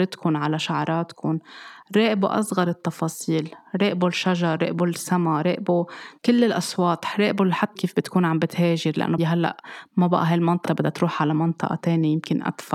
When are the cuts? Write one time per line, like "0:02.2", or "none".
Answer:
0:07.8
0:09.2
0:10.7